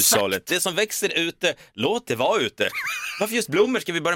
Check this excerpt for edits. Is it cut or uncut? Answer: uncut